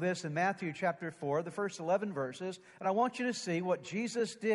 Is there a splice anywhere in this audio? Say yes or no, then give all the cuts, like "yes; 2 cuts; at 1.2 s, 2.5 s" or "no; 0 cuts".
no; 0 cuts